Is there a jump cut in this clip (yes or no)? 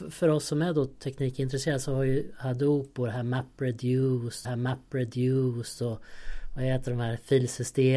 yes